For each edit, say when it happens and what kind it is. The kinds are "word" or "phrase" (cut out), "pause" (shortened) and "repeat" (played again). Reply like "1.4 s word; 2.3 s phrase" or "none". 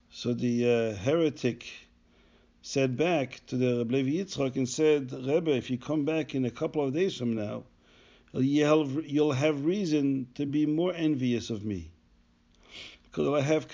none